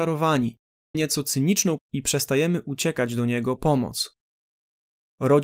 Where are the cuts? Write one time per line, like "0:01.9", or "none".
0:00.9
0:01.8
0:03.6

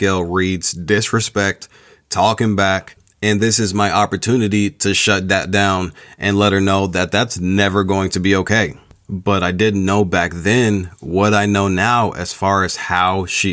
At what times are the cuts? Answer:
none

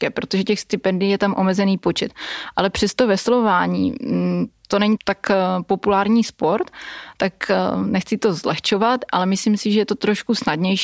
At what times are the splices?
0:05.0

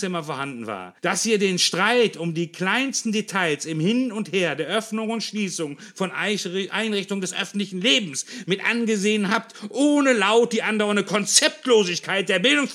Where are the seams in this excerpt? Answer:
0:01.0

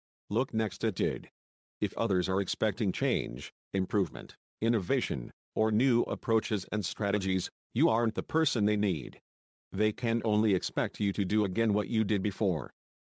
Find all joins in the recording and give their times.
none

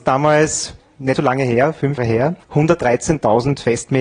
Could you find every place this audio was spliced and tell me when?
0:01.2
0:02.0
0:02.4

